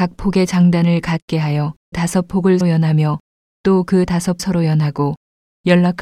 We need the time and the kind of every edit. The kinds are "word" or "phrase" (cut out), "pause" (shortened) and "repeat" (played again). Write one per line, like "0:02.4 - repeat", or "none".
0:01.9 - word
0:02.6 - word
0:04.4 - word